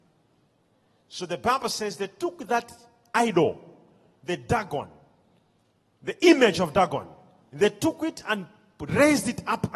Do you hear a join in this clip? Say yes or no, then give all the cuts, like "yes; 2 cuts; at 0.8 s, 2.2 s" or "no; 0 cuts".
no; 0 cuts